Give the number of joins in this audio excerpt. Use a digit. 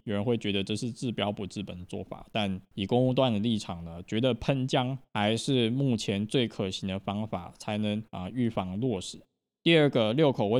3